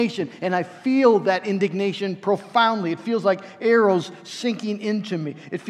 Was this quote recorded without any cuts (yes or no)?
yes